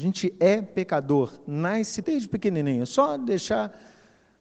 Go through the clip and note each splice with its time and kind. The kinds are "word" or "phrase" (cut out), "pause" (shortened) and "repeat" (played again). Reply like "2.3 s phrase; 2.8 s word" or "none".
2.0 s word